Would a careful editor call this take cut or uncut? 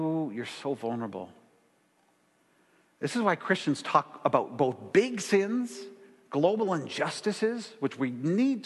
uncut